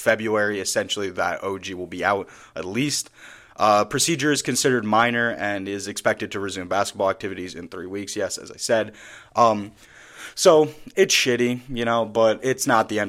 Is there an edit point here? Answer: no; 0 cuts

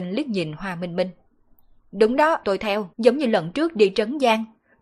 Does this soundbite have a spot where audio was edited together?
yes; 2 cuts; at 2.4 s, 2.9 s

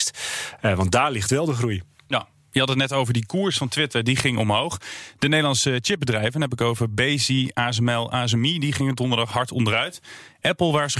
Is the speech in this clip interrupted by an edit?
no; 0 cuts

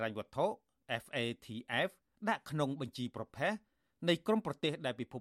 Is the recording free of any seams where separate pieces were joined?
yes; 0 cuts

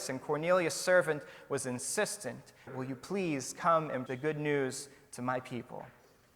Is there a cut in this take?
yes; 2 cuts; at 2.7 s, 4.1 s

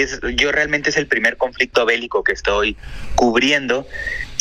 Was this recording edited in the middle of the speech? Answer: no; 0 cuts

